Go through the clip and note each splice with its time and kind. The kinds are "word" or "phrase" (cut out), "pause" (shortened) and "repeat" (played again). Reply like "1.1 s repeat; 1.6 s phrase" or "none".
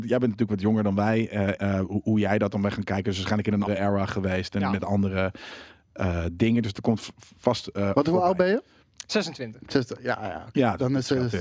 1.6 s word; 3.7 s word